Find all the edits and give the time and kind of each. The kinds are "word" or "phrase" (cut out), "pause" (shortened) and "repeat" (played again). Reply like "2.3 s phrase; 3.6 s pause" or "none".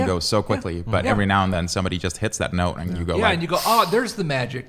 none